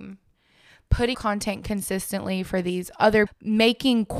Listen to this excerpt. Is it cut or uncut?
cut